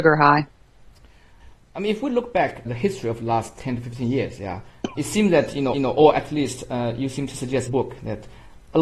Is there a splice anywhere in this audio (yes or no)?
yes